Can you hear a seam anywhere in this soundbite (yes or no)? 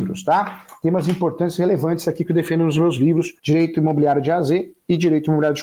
yes